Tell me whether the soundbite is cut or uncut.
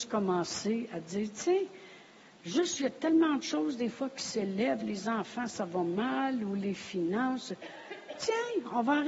uncut